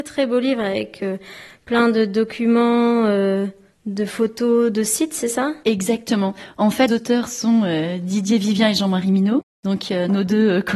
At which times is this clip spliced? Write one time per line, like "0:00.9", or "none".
0:03.7
0:06.9